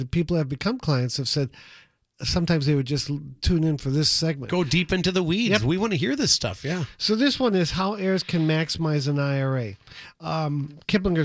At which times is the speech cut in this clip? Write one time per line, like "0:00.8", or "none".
none